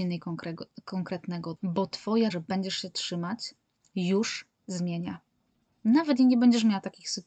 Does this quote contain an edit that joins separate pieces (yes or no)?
yes